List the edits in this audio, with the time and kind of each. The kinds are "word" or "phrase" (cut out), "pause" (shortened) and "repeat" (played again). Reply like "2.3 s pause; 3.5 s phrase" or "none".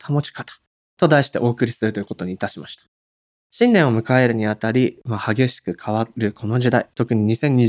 none